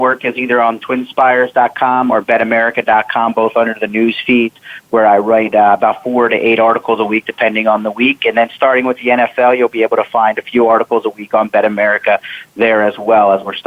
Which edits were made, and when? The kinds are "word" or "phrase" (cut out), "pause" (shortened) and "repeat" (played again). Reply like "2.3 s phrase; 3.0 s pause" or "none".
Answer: none